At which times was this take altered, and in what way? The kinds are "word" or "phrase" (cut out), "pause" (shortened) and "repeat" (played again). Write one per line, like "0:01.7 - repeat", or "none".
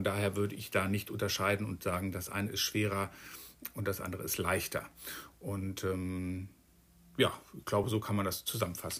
none